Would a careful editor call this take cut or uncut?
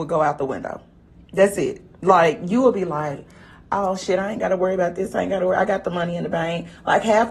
cut